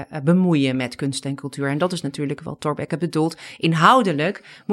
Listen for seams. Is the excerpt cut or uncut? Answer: uncut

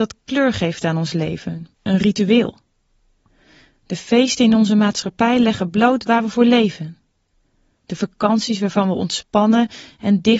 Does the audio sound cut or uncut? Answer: cut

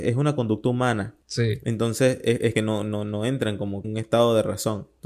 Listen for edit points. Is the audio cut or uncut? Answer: cut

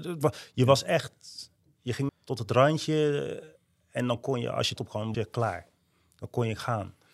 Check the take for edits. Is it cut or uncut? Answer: cut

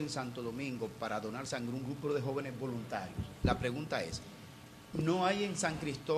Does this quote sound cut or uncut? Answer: uncut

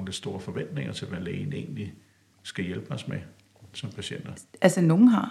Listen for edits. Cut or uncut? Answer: uncut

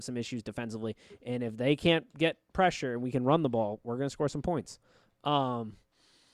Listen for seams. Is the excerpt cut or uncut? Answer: uncut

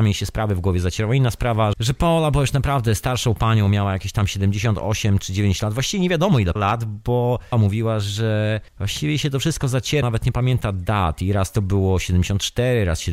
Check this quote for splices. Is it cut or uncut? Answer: cut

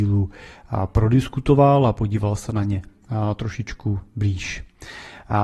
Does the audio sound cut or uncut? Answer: uncut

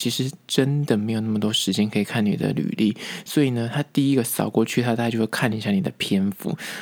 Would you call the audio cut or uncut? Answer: uncut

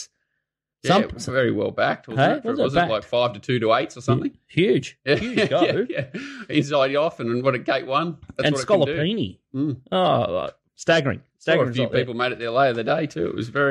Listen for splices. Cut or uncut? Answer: cut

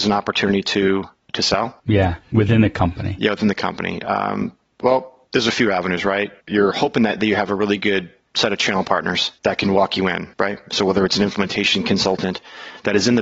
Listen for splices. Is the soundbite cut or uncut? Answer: cut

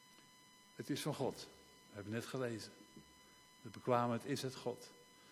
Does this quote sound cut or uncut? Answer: uncut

